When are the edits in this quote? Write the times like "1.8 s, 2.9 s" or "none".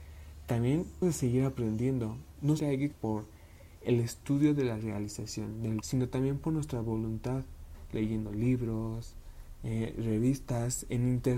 1.0 s, 2.6 s, 2.9 s, 5.8 s